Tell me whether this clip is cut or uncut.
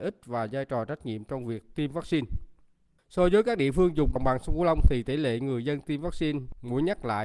uncut